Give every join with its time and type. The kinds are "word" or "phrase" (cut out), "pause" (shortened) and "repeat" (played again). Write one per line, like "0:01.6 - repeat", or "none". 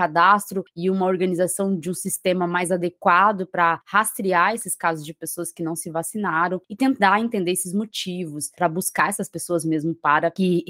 none